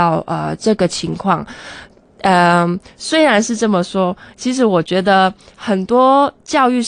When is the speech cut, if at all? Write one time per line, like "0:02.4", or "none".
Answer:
none